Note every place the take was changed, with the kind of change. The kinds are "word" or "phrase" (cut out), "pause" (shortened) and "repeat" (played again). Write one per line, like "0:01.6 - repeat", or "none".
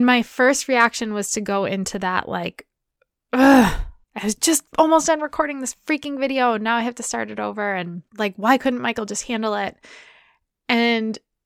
0:04.0 - pause
0:04.7 - pause
0:08.1 - pause